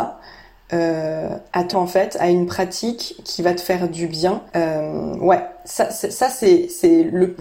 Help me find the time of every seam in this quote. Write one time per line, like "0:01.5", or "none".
0:01.7
0:04.5